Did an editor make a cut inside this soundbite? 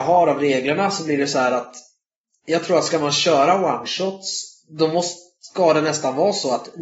no; 0 cuts

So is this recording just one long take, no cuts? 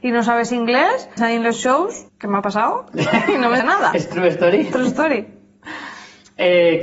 no; 3 cuts; at 1.2 s, 2.1 s, 3.6 s

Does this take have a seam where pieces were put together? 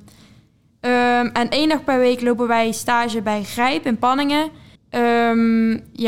yes; 1 cut; at 4.8 s

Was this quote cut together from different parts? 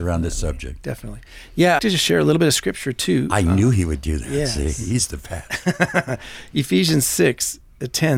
yes; 1 cut; at 1.8 s

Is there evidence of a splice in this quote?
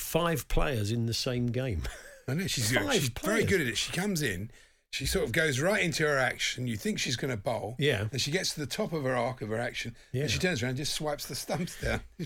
no; 0 cuts

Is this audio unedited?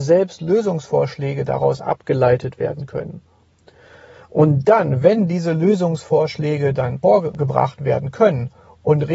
yes; 0 cuts

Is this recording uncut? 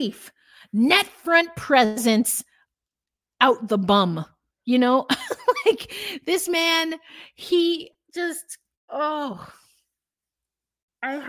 yes; 0 cuts

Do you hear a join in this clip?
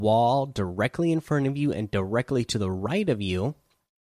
no; 0 cuts

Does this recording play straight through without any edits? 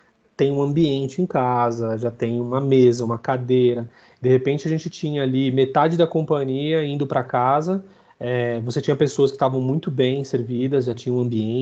yes; 0 cuts

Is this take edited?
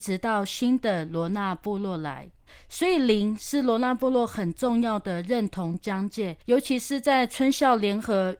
yes; 2 cuts; at 2.5 s, 6.4 s

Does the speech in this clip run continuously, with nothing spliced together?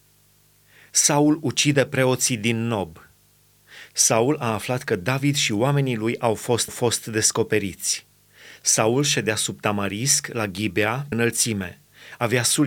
no; 2 cuts; at 6.7 s, 11.1 s

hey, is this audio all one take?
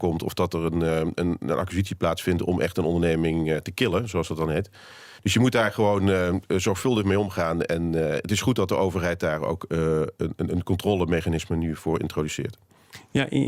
no; 1 cut; at 5.2 s

